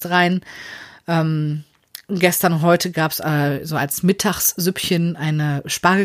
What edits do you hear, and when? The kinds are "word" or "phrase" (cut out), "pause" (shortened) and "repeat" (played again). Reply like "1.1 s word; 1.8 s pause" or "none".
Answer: none